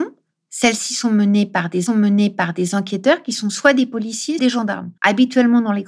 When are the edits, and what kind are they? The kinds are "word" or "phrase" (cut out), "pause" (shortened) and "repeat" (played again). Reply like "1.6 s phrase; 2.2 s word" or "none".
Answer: 1.9 s repeat; 4.4 s word; 5.0 s pause